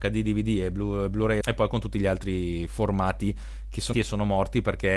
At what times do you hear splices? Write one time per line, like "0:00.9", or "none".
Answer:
0:01.4
0:03.9